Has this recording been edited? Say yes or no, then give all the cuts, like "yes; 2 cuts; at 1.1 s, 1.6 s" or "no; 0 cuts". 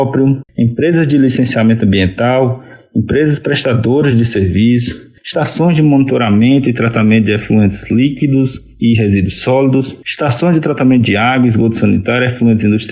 no; 0 cuts